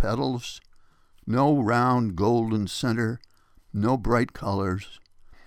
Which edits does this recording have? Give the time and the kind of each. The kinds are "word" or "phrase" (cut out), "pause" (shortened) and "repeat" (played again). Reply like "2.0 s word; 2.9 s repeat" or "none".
none